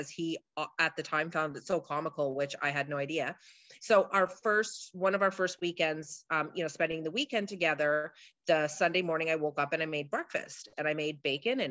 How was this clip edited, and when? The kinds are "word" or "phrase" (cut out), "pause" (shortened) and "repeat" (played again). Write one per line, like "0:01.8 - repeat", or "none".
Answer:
none